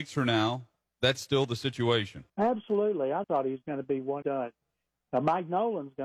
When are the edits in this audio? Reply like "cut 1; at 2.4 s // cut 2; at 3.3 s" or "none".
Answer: cut 1; at 2.3 s // cut 2; at 3.2 s // cut 3; at 4.2 s